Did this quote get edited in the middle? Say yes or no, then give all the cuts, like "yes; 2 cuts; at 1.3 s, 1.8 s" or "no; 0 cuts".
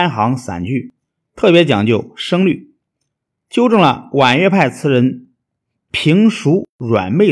no; 0 cuts